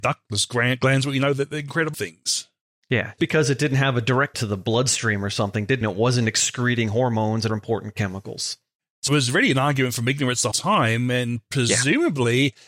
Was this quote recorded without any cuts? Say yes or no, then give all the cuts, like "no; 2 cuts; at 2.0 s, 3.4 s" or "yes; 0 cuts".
no; 7 cuts; at 1.9 s, 3.2 s, 4.3 s, 5.8 s, 7.5 s, 9.1 s, 10.5 s